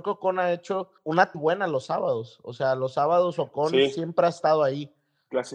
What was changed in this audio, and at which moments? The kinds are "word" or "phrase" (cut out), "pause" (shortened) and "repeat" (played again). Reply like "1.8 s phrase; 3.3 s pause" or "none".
1.3 s phrase